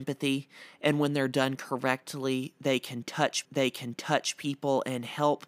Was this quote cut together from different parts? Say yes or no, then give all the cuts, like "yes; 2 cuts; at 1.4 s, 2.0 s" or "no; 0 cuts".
yes; 1 cut; at 3.4 s